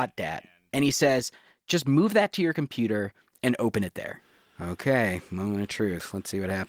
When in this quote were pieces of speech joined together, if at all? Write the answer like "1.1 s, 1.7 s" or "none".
none